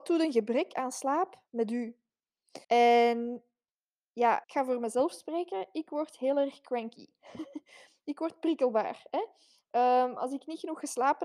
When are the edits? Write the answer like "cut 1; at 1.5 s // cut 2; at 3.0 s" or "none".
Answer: cut 1; at 1.5 s // cut 2; at 2.6 s // cut 3; at 4.4 s